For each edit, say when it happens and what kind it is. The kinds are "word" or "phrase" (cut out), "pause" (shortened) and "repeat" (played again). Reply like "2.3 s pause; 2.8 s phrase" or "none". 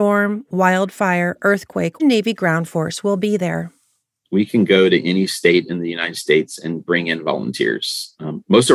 2.0 s phrase

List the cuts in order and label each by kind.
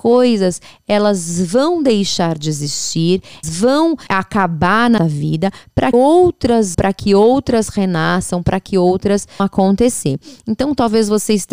3.4 s word; 4.1 s word; 5.0 s word; 5.9 s word; 6.7 s word; 9.4 s word

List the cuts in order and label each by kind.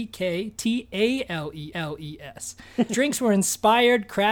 1.7 s repeat; 2.9 s word

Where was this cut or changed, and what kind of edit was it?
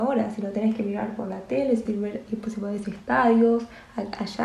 1.9 s word; 2.8 s phrase

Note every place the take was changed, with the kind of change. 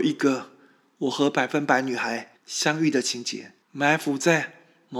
2.4 s pause; 3.6 s pause

